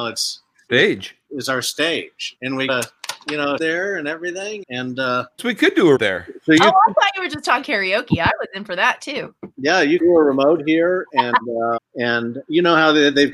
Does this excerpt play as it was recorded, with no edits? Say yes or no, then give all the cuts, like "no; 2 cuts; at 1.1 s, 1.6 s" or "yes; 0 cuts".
no; 9 cuts; at 2.4 s, 2.7 s, 3.6 s, 4.6 s, 5.4 s, 6.0 s, 7.6 s, 10.0 s, 11.8 s